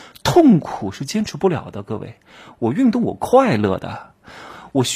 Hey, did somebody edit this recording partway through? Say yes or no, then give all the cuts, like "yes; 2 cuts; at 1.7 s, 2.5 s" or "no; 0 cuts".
no; 0 cuts